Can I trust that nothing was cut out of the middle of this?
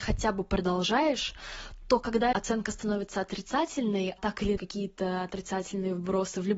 no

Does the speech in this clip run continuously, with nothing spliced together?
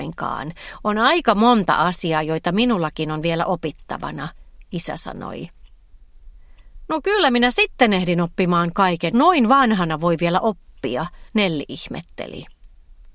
no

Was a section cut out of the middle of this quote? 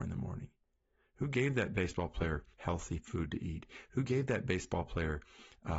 yes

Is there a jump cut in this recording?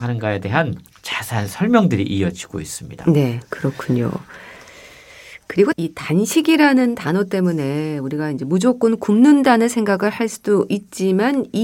yes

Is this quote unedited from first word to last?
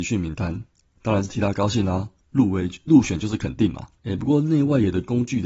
no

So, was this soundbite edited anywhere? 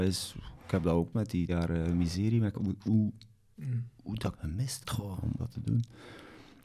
yes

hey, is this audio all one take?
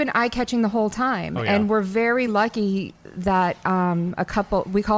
yes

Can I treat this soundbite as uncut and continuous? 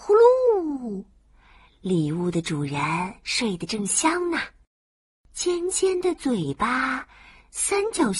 yes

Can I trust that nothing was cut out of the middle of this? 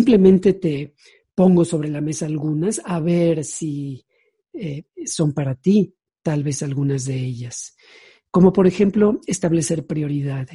yes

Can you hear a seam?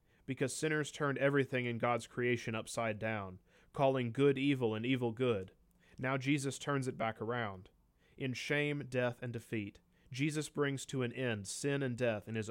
no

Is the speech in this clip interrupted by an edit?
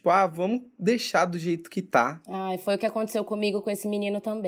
no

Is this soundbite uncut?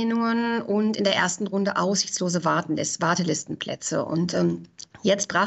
yes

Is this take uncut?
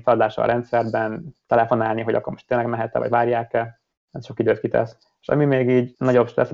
yes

